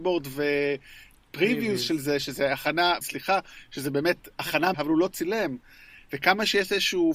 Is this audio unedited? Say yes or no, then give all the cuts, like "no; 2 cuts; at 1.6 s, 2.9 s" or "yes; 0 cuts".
no; 2 cuts; at 3.0 s, 4.7 s